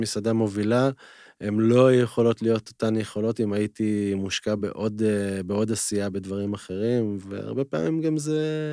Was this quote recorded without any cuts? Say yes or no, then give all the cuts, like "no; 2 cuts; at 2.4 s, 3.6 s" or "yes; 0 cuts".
yes; 0 cuts